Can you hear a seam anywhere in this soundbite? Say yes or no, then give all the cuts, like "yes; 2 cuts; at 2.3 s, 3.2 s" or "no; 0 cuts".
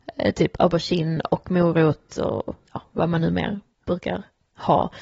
yes; 1 cut; at 2.6 s